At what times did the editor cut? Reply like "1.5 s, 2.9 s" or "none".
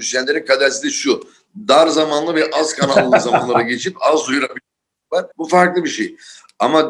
4.7 s, 5.3 s